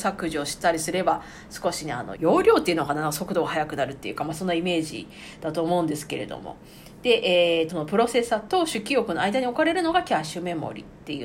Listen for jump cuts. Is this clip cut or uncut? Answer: cut